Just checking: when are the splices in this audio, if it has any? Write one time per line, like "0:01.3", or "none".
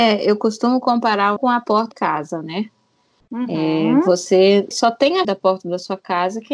0:01.4
0:01.9
0:04.7
0:05.2